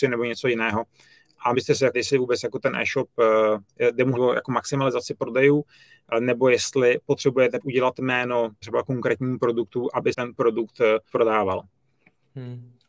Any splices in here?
yes; 7 cuts; at 1.5 s, 1.9 s, 4.2 s, 7.6 s, 8.6 s, 10.1 s, 11.1 s

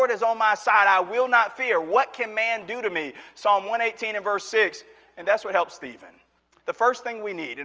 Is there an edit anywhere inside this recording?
no; 0 cuts

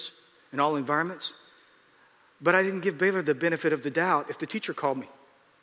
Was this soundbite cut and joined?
no; 0 cuts

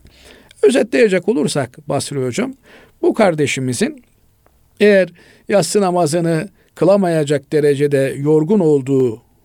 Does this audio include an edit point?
no; 0 cuts

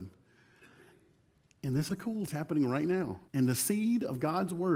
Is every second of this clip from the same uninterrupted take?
no; 3 cuts; at 1.9 s, 2.3 s, 3.3 s

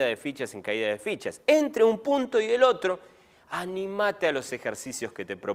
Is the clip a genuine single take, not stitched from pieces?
yes; 0 cuts

